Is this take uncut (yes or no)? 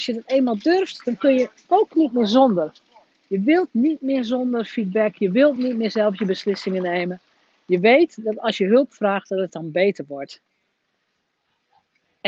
yes